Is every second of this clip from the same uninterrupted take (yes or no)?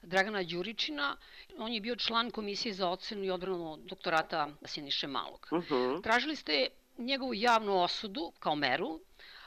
yes